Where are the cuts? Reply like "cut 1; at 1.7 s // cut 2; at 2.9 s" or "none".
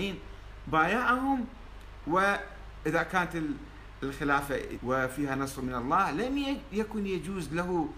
cut 1; at 4.8 s